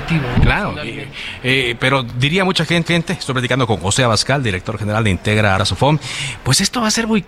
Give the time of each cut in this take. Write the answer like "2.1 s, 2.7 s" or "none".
2.9 s, 5.6 s